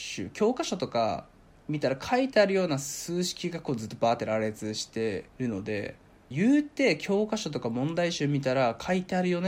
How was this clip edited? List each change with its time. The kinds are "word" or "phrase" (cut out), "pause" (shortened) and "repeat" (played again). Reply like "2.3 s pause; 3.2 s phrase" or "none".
5.3 s pause; 6.3 s phrase